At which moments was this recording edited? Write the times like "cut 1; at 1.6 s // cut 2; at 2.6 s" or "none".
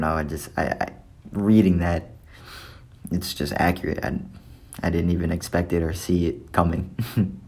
none